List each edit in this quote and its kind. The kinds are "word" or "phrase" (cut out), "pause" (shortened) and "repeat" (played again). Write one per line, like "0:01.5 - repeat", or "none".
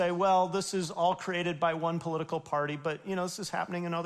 none